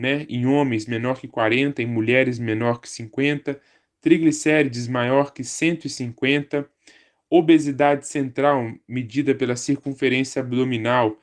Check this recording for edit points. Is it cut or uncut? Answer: uncut